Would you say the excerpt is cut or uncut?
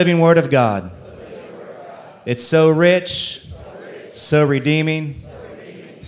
uncut